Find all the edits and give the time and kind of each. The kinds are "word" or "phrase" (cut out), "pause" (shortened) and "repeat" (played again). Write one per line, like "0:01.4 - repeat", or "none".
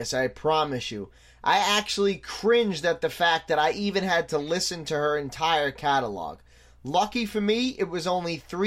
none

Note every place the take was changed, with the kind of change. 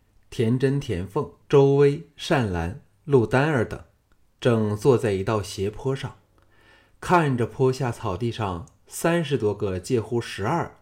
0:01.4 - pause

